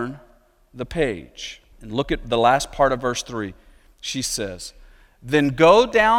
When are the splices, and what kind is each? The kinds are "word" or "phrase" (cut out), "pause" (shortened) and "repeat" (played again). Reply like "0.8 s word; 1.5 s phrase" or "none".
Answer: 1.7 s pause